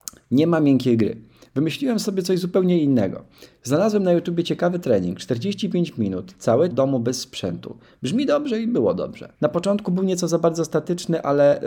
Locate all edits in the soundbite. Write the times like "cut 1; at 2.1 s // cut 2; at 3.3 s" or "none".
cut 1; at 6.7 s // cut 2; at 9.3 s